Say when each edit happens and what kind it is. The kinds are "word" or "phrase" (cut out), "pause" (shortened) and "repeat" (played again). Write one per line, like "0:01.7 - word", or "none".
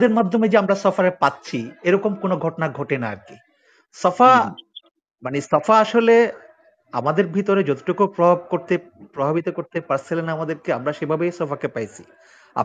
none